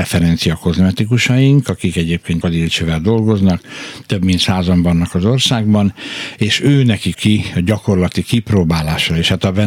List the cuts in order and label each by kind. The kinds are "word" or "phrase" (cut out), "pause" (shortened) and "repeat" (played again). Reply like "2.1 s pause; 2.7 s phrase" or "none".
2.4 s word; 7.1 s word

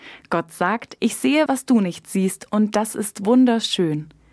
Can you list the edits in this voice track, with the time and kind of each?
1.5 s word

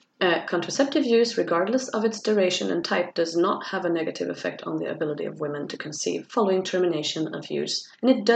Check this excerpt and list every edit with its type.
none

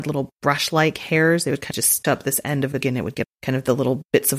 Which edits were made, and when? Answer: 1.7 s word; 2.0 s word; 2.8 s word; 3.2 s word

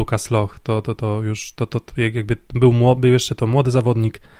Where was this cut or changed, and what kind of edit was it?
none

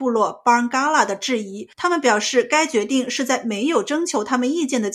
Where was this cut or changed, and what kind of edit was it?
1.7 s pause

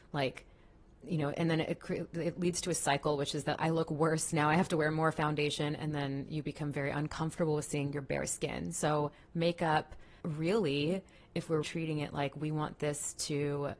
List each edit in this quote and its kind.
3.6 s word; 10.2 s pause; 11.6 s word

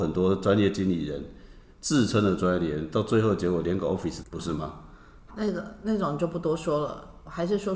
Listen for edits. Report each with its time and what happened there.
4.2 s phrase; 5.3 s word

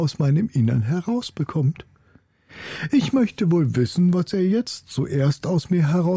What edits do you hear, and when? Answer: none

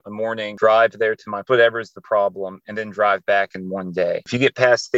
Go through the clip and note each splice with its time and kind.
1.5 s phrase

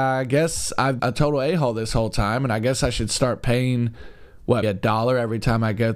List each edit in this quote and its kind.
1.0 s word; 4.6 s word

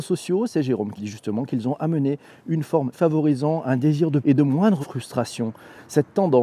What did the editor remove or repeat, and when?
1.0 s word; 2.9 s word; 4.2 s word; 4.8 s phrase

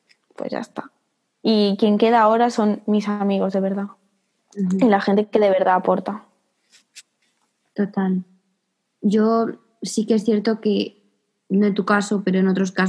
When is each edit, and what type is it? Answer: none

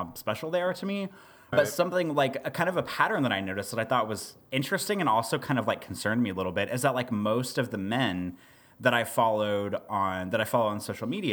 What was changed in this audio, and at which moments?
1.5 s word

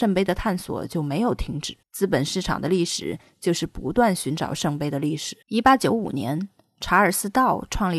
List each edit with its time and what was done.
1.8 s pause; 5.4 s pause

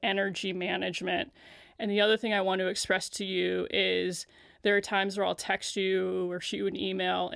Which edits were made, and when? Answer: none

